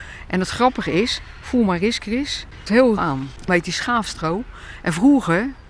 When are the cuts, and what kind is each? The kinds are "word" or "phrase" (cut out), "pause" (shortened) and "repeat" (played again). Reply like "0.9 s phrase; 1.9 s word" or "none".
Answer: 2.7 s word; 3.0 s word; 3.5 s word